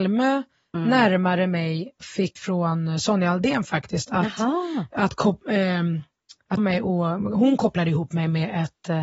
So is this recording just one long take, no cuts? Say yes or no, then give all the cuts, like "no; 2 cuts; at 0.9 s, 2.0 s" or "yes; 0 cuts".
no; 4 cuts; at 2.0 s, 2.4 s, 4.9 s, 6.6 s